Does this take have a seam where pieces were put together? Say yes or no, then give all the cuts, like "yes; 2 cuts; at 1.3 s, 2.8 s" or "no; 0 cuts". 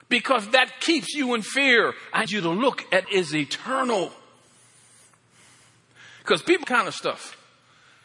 yes; 3 cuts; at 2.3 s, 3.0 s, 6.6 s